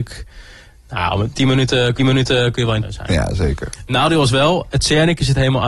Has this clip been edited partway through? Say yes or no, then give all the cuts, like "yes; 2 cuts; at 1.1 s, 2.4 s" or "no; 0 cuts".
yes; 3 cuts; at 1.3 s, 2.0 s, 2.8 s